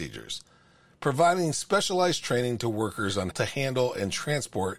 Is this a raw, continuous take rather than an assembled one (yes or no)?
no